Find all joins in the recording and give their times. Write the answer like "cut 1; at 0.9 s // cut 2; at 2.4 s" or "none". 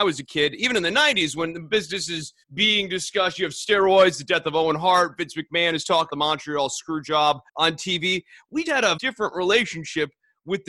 cut 1; at 2.4 s // cut 2; at 6.1 s // cut 3; at 7.5 s // cut 4; at 8.7 s // cut 5; at 9.0 s